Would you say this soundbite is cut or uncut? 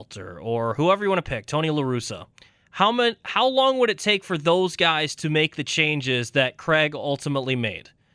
cut